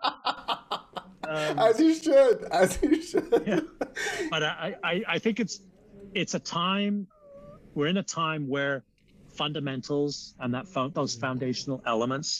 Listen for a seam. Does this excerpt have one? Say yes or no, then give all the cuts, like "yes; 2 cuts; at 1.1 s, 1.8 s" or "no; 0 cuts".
no; 0 cuts